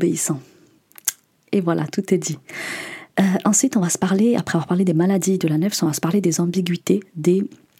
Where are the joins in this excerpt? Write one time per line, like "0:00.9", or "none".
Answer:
none